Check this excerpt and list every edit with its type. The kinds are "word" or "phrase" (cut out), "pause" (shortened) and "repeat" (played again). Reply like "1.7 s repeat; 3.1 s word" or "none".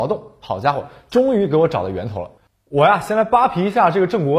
2.4 s pause